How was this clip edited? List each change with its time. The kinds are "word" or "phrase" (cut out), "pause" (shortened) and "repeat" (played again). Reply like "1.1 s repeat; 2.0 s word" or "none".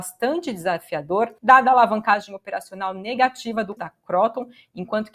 1.4 s pause; 3.8 s word